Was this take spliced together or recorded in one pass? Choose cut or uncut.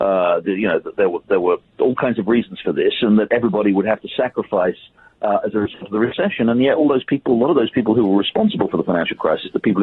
uncut